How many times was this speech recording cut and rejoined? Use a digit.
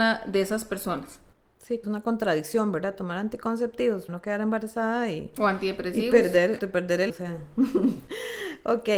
4